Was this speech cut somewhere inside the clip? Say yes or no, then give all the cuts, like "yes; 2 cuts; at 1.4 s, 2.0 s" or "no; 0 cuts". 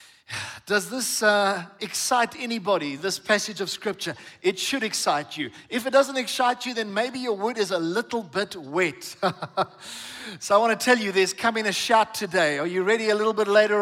no; 0 cuts